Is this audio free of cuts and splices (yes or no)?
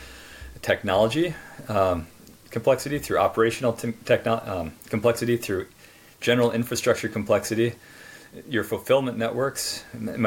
yes